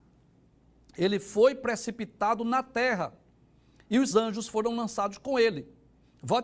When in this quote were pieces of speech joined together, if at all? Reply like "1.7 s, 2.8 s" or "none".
4.1 s